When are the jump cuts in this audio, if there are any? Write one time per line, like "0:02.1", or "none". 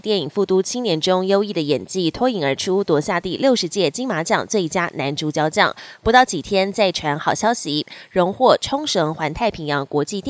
none

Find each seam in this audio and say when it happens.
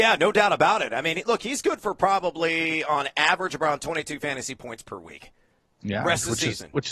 none

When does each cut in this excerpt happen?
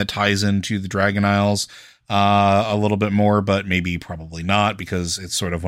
none

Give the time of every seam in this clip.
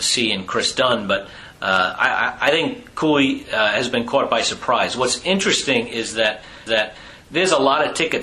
0:06.7

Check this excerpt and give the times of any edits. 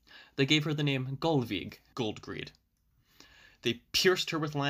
0:01.9

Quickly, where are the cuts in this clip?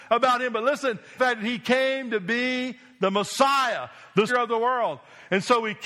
0:01.2
0:04.3

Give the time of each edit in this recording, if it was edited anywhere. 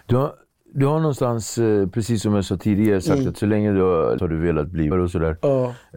0:04.2
0:04.9

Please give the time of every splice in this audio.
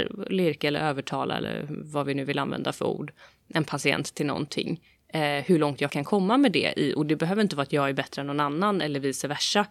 0:05.9

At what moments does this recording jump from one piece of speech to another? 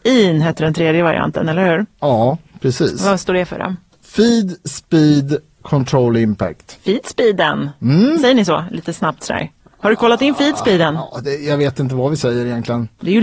none

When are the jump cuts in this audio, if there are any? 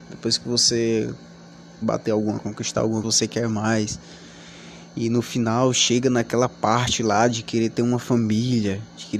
0:01.8
0:02.4
0:03.0

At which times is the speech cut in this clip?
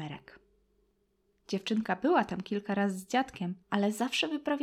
0:03.6

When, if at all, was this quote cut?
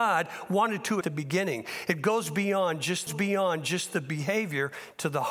0:01.0
0:03.1

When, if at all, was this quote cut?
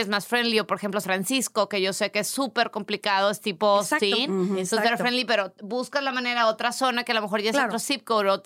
0:01.0

